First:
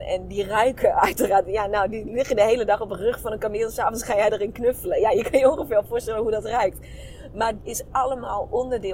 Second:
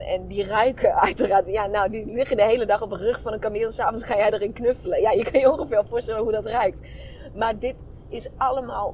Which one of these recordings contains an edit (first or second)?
first